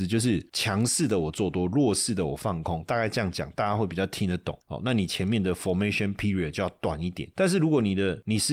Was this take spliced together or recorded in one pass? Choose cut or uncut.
uncut